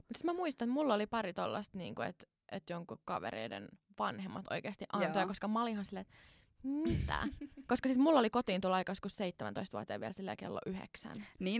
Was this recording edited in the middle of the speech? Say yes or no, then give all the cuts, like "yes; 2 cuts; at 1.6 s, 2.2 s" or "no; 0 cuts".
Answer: no; 0 cuts